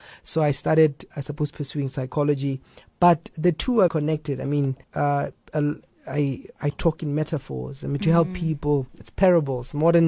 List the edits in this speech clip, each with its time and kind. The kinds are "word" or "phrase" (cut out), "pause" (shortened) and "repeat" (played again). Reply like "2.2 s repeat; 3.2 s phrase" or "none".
1.1 s word; 3.3 s word; 3.9 s word; 4.8 s pause; 8.9 s pause